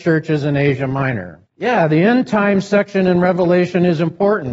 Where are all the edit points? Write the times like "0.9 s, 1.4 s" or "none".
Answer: 1.5 s

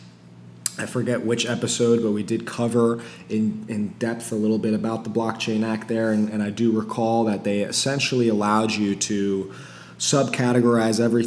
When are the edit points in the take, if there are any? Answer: none

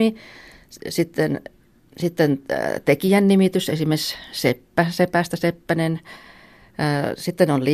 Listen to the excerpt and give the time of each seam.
none

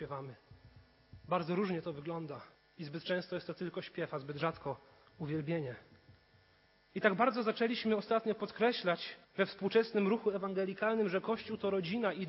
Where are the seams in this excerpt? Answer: 2.5 s, 6.7 s, 9.2 s

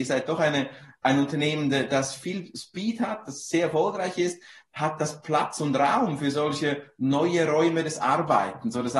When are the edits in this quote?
none

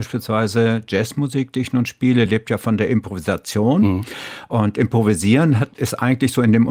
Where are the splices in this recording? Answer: none

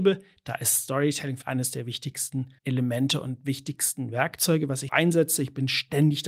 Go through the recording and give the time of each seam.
1.4 s, 2.6 s, 4.9 s

